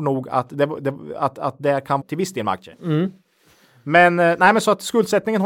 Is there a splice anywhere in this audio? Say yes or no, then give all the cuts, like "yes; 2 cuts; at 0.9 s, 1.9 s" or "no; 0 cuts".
yes; 1 cut; at 2.0 s